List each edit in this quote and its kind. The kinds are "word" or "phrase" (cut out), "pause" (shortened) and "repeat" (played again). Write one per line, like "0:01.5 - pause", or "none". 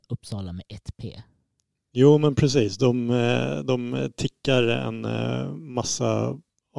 none